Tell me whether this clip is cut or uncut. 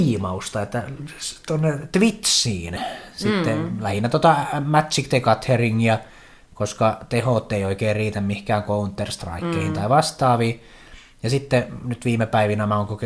uncut